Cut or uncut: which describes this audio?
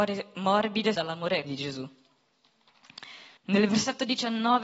cut